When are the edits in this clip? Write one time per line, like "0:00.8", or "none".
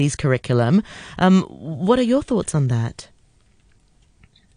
none